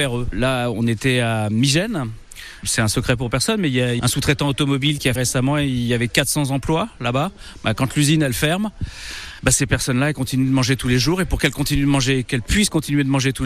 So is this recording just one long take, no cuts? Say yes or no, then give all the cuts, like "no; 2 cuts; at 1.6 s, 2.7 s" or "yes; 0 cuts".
no; 1 cut; at 5.2 s